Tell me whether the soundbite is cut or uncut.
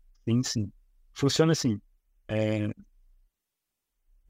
uncut